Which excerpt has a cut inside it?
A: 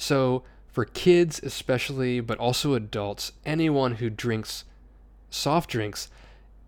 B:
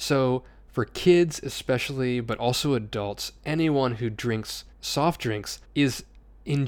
B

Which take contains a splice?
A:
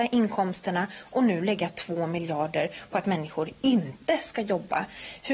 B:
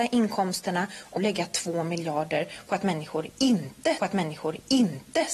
B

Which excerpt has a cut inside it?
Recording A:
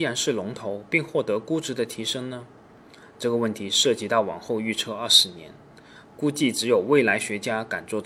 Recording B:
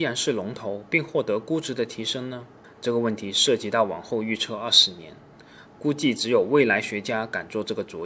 B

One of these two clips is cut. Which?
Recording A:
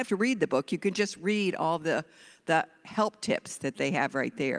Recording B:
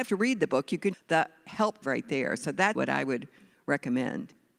B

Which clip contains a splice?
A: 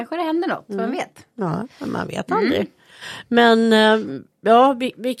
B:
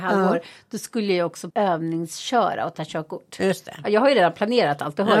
B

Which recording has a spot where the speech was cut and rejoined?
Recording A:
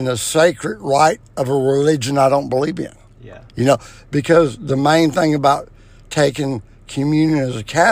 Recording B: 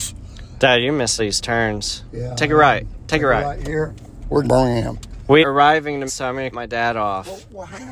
B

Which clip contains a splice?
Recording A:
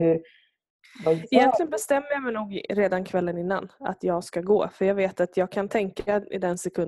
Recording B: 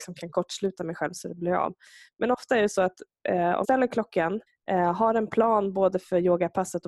B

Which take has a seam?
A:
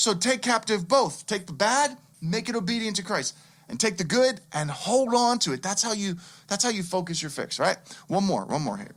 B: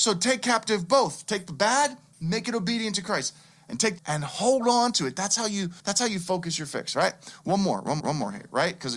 B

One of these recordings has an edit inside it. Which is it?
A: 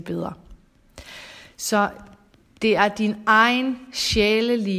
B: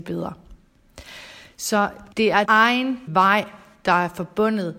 B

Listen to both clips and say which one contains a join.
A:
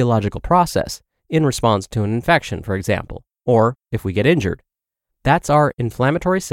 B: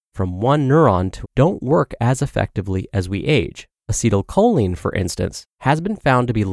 B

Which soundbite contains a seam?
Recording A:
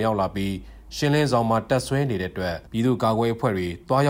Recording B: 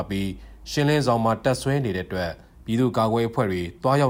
A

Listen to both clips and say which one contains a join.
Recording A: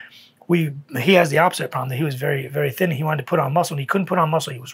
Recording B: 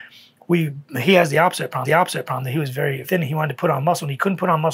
B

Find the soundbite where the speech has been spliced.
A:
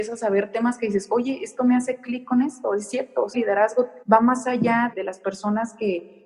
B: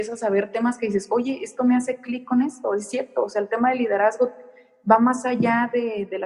A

